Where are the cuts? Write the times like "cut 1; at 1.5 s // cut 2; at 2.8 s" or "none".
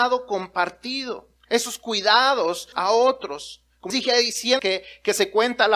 cut 1; at 1.4 s // cut 2; at 2.7 s // cut 3; at 3.9 s // cut 4; at 4.6 s